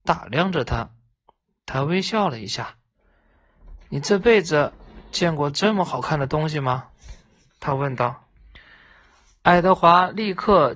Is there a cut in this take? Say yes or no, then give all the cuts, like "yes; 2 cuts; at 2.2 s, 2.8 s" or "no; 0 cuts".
no; 0 cuts